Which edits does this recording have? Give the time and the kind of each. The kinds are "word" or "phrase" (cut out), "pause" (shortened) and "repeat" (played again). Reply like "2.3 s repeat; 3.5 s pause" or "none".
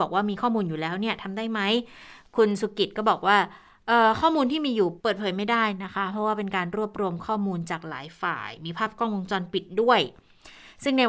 5.0 s pause